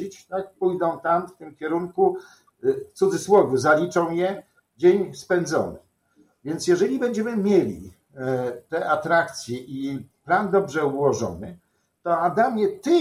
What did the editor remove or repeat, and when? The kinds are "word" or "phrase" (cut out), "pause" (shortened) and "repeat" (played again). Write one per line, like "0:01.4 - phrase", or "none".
none